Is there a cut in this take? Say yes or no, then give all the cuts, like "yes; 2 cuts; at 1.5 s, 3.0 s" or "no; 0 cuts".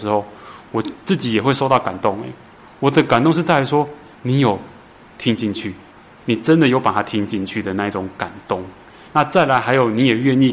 no; 0 cuts